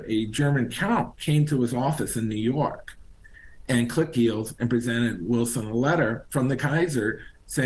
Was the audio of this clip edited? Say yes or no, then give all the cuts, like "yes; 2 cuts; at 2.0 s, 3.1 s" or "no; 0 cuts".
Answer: yes; 1 cut; at 4.1 s